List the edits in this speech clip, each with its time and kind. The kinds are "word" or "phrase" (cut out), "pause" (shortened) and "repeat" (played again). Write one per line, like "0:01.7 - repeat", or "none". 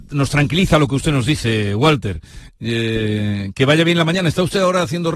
none

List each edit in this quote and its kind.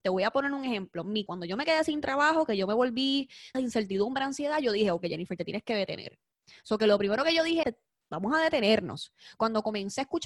0:01.3 - word
0:03.5 - word
0:07.6 - word

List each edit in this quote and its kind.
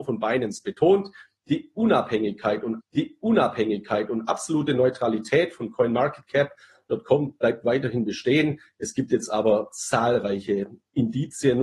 0:02.8 - repeat

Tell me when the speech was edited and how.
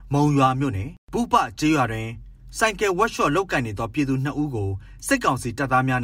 0:01.0 - pause

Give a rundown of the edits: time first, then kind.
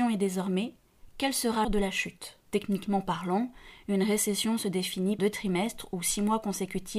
0:01.6 - word
0:02.5 - pause
0:05.2 - word

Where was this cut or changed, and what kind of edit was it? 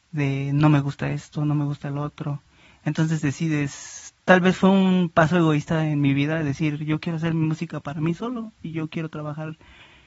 0:04.2 - pause

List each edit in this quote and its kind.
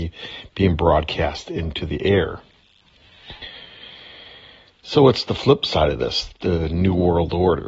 none

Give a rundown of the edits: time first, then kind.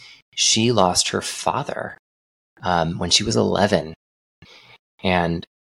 none

